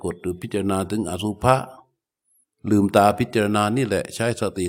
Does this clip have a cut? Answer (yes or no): no